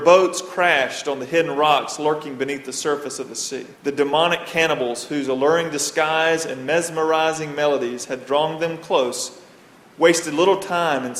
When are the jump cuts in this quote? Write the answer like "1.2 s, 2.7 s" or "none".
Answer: 3.8 s